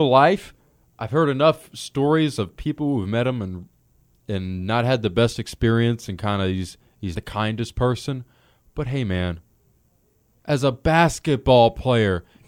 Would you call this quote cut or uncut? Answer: cut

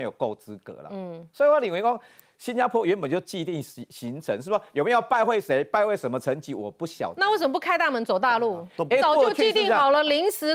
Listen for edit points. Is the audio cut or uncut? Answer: uncut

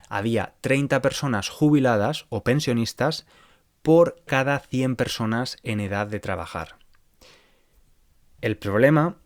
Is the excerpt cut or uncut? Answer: uncut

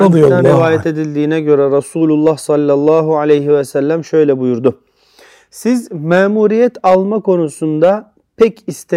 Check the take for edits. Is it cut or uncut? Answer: uncut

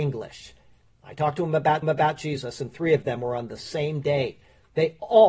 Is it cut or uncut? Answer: cut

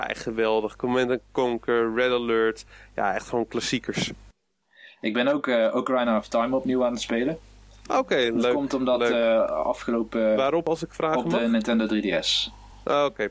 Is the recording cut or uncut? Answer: uncut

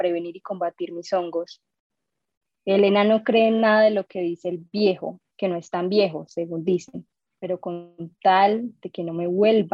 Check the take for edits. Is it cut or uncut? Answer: uncut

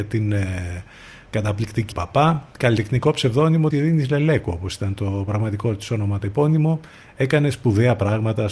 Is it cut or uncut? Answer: cut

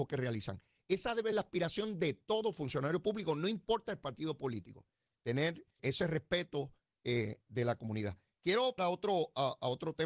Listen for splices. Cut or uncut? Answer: cut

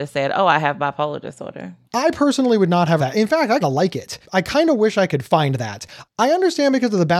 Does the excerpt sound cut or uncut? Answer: cut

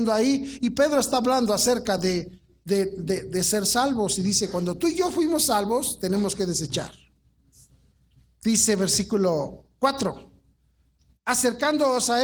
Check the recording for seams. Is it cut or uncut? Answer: uncut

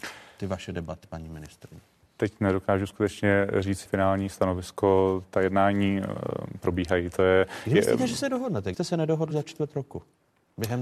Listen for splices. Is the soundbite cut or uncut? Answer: cut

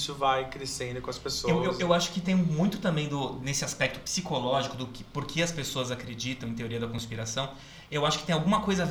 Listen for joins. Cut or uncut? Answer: uncut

